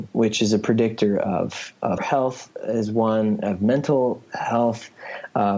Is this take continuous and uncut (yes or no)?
no